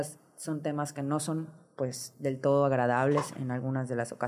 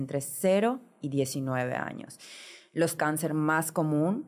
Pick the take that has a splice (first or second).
second